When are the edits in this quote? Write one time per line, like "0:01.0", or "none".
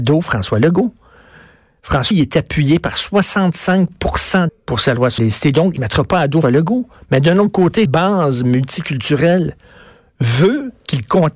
0:02.1
0:04.5
0:05.2
0:05.8
0:06.4
0:07.9

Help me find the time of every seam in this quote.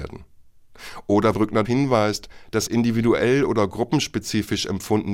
0:01.3
0:01.6
0:02.7

